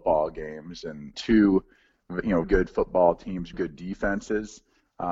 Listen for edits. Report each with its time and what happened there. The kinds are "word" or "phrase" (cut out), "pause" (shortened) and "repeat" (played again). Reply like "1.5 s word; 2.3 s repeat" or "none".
1.1 s word; 2.4 s word; 3.5 s word